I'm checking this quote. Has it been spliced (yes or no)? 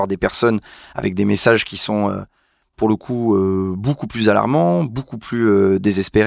no